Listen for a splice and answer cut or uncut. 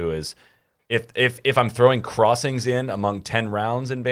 uncut